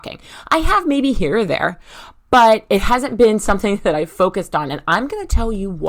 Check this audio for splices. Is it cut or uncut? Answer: uncut